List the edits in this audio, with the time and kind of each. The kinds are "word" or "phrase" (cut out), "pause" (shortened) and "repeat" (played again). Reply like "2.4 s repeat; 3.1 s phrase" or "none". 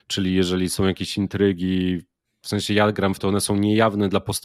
3.2 s phrase